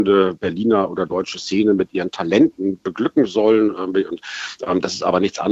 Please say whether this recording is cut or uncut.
uncut